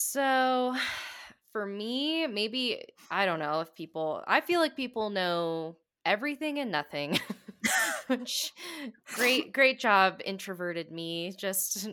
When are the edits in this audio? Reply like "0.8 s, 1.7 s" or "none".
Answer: none